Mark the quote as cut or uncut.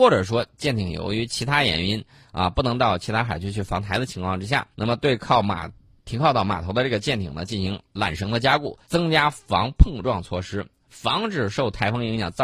cut